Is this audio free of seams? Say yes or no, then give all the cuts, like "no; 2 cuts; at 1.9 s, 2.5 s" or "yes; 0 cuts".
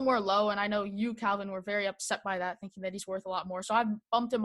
yes; 0 cuts